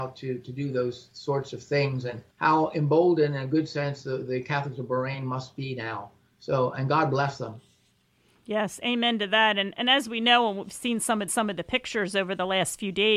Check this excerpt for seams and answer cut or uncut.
cut